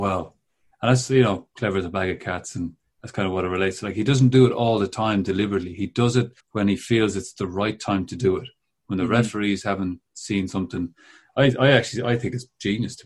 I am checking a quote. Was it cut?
yes; 1 cut; at 6.4 s

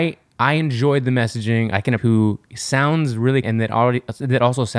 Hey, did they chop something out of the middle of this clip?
yes; 3 cuts; at 2.0 s, 2.4 s, 3.4 s

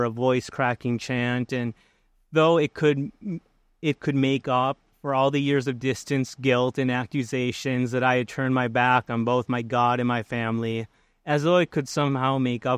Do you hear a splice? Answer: no; 0 cuts

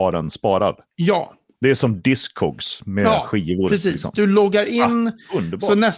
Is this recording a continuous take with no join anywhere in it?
yes; 0 cuts

